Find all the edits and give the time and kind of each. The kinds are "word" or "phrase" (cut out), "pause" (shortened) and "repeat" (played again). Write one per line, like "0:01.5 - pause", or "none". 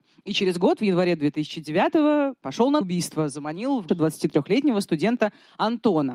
0:02.8 - word
0:03.9 - word